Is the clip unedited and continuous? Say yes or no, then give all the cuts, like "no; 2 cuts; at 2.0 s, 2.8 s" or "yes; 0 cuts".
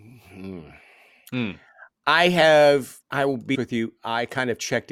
no; 2 cuts; at 3.0 s, 3.5 s